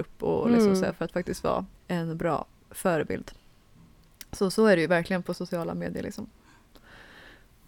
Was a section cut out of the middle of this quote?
yes; 1 cut; at 1.8 s

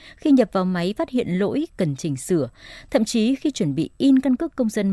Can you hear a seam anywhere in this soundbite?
no; 0 cuts

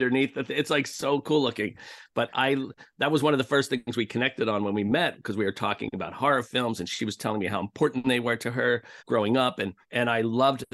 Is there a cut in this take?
yes; 3 cuts; at 2.3 s, 9.0 s, 9.8 s

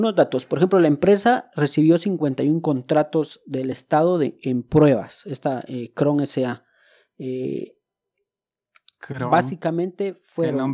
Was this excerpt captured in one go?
yes; 0 cuts

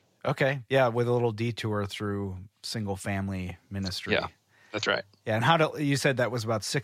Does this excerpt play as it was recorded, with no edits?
yes; 0 cuts

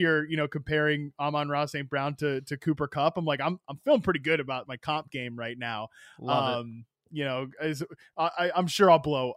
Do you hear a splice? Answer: no; 0 cuts

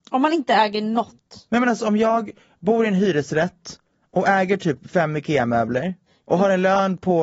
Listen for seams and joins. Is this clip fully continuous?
yes; 0 cuts

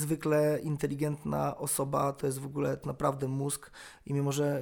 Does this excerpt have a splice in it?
yes; 1 cut; at 2.8 s

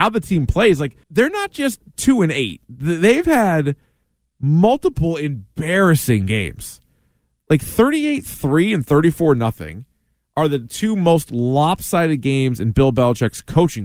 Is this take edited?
yes; 2 cuts; at 1.0 s, 2.6 s

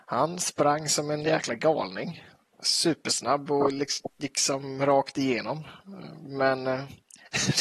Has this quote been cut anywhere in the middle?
no; 0 cuts

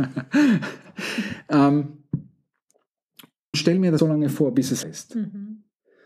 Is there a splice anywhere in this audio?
yes; 3 cuts; at 3.5 s, 4.0 s, 4.8 s

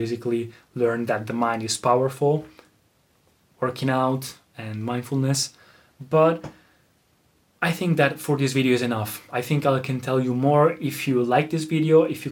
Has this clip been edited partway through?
no; 0 cuts

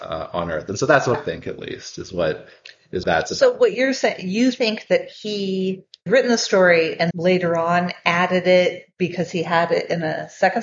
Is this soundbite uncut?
no; 4 cuts; at 1.1 s, 3.0 s, 6.1 s, 7.1 s

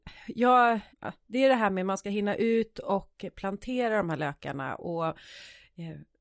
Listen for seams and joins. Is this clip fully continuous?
no; 1 cut; at 0.9 s

